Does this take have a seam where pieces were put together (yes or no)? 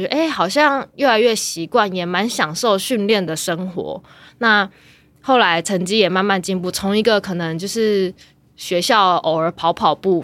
no